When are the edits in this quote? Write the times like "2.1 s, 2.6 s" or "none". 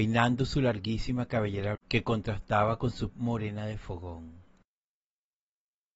1.7 s, 3.1 s